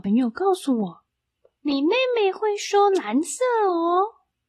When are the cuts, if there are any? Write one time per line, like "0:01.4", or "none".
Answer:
0:01.1